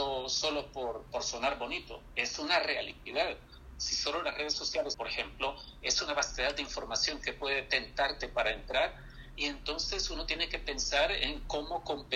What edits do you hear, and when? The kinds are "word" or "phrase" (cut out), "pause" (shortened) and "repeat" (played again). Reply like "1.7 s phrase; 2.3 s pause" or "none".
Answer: 4.9 s phrase